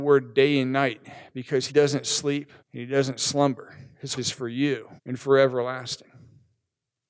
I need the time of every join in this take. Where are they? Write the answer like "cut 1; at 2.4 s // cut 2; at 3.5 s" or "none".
cut 1; at 1.7 s // cut 2; at 2.6 s // cut 3; at 4.2 s // cut 4; at 5.0 s